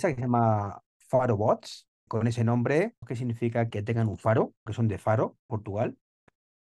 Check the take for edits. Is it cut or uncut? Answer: cut